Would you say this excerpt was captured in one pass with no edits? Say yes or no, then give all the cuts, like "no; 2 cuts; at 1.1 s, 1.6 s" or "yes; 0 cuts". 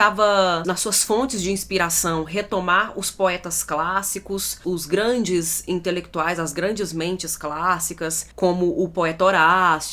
yes; 0 cuts